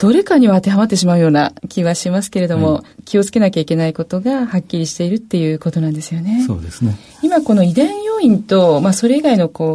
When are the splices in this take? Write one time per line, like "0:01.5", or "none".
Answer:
0:01.6
0:02.9